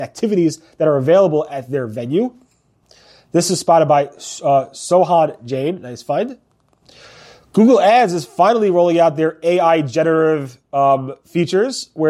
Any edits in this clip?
no; 0 cuts

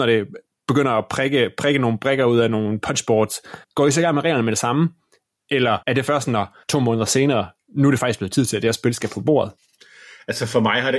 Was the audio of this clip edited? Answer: yes; 3 cuts; at 3.6 s, 5.8 s, 6.6 s

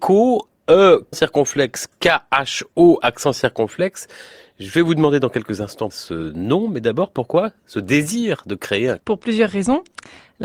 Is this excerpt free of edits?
no; 3 cuts; at 1.1 s, 5.9 s, 9.0 s

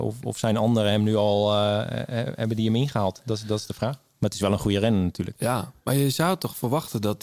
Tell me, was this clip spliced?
yes; 1 cut; at 5.8 s

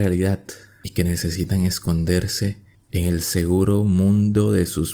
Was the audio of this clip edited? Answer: no; 0 cuts

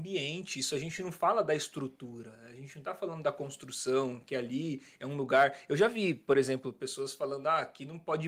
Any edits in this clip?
no; 0 cuts

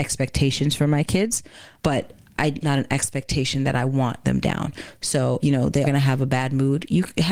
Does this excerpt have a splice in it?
yes; 5 cuts; at 1.8 s, 2.6 s, 4.2 s, 5.4 s, 5.8 s

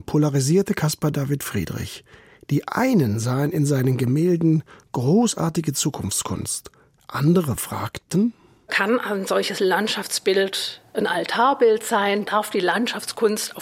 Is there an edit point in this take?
no; 0 cuts

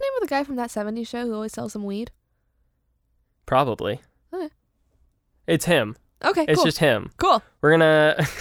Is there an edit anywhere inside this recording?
no; 0 cuts

